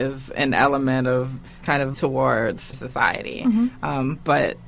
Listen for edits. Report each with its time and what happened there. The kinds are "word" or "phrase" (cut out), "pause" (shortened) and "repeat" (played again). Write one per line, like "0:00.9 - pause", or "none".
0:01.6 - word
0:01.9 - word
0:02.7 - word